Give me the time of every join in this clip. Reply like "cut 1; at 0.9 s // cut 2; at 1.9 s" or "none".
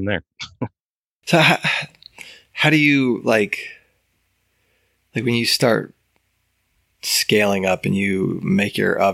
none